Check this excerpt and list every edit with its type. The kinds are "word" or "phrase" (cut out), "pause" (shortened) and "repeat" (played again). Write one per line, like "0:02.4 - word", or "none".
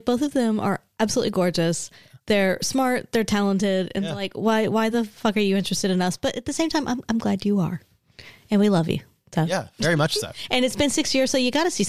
none